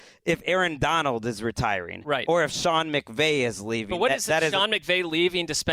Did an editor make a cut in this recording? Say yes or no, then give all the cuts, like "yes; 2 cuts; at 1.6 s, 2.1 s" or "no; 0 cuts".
no; 0 cuts